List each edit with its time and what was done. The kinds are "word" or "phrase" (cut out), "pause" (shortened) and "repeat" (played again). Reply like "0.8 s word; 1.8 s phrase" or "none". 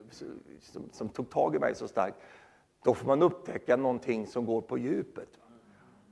none

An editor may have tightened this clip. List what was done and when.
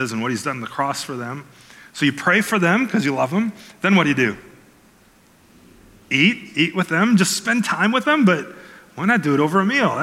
none

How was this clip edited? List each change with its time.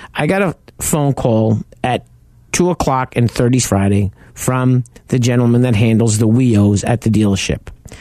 1.7 s pause; 3.6 s phrase

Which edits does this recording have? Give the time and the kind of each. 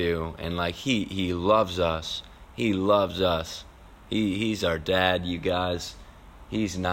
none

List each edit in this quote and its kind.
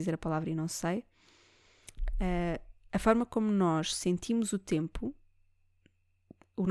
none

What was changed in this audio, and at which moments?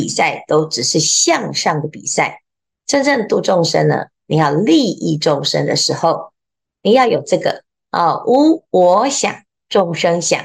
none

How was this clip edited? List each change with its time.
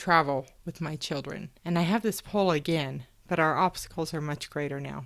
1.6 s pause

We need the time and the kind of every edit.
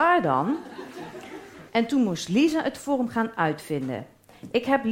1.7 s pause

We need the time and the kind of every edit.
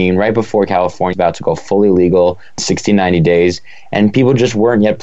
1.1 s word; 2.6 s word

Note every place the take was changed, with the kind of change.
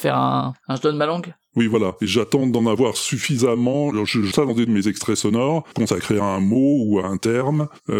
4.3 s word; 4.7 s word; 5.7 s word

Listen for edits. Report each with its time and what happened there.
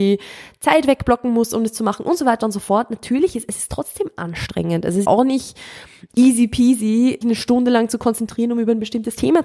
5.0 s word; 7.2 s word

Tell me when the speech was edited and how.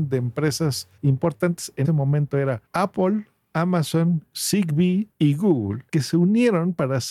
1.0 s pause; 1.8 s word; 2.7 s pause; 5.1 s pause; 5.9 s pause

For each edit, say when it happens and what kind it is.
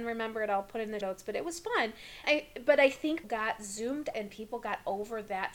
1.0 s word; 2.2 s word; 3.2 s word; 4.1 s word

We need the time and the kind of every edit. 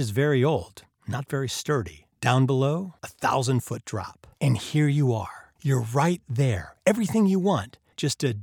2.1 s pause; 3.0 s pause; 4.3 s pause; 5.6 s pause; 6.8 s pause

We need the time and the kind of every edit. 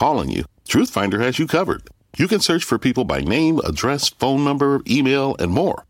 none

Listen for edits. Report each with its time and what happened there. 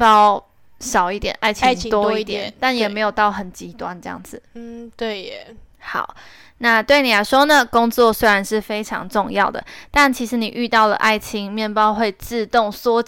none

